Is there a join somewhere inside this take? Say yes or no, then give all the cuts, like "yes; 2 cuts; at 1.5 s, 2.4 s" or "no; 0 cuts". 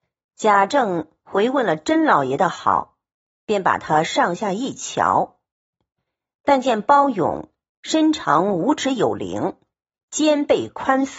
no; 0 cuts